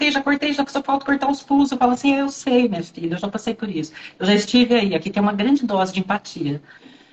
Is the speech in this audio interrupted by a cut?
no; 0 cuts

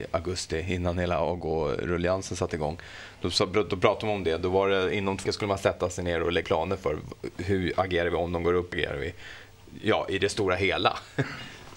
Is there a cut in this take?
yes; 3 cuts; at 5.3 s, 6.4 s, 8.7 s

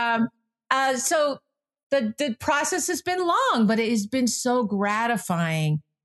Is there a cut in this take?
no; 0 cuts

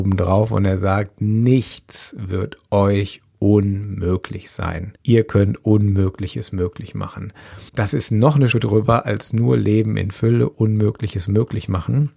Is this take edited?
yes; 3 cuts; at 5.0 s, 7.7 s, 8.5 s

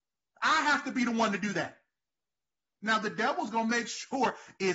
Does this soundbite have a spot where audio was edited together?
no; 0 cuts

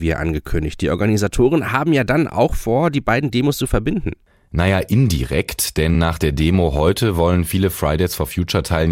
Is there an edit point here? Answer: no; 0 cuts

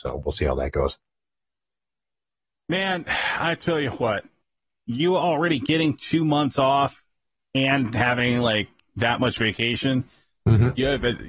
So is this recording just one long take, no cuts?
yes; 0 cuts

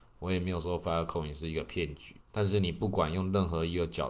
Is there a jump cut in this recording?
yes; 1 cut; at 2.2 s

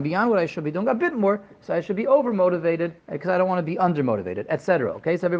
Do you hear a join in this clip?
yes; 1 cut; at 3.0 s

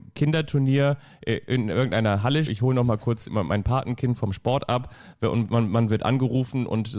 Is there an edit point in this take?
yes; 2 cuts; at 2.5 s, 3.3 s

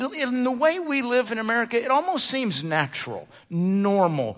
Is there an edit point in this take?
yes; 1 cut; at 1.2 s

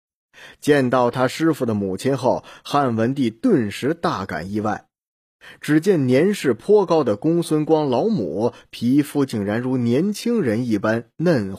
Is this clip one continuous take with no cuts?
yes; 0 cuts

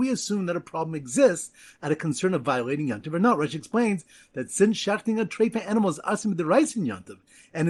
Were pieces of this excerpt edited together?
no; 0 cuts

